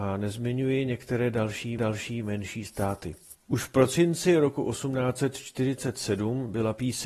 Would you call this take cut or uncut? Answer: cut